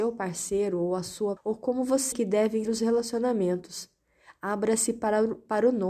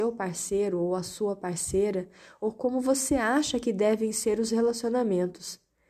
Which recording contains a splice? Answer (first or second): first